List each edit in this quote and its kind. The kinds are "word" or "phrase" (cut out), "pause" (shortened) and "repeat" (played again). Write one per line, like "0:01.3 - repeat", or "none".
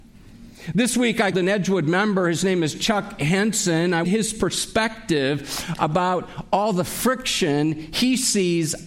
0:01.3 - word
0:04.0 - phrase